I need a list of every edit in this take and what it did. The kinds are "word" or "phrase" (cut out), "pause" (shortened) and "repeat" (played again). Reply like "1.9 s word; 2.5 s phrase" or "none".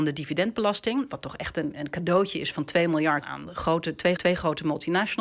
3.2 s word; 4.2 s repeat